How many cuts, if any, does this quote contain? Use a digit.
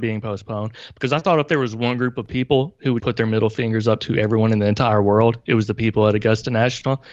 1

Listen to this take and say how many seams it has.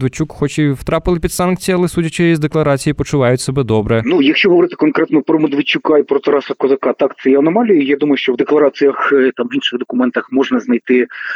0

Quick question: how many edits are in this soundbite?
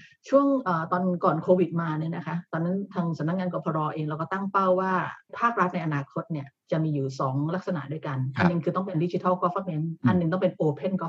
0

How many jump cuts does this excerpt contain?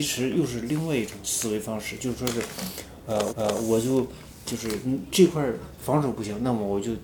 2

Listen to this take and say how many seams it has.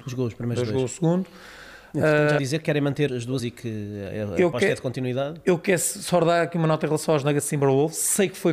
3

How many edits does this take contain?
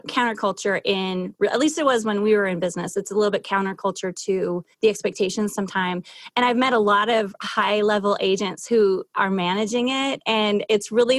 1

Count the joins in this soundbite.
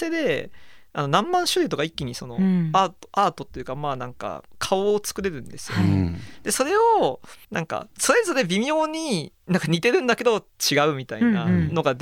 2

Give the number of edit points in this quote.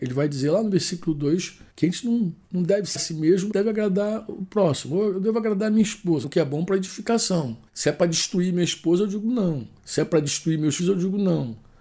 8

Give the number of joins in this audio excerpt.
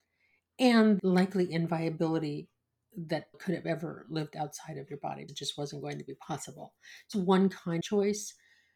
5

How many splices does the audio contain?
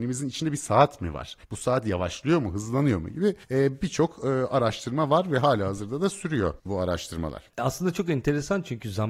4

